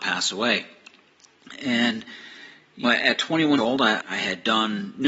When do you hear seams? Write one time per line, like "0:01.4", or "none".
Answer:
0:02.8
0:03.6
0:04.0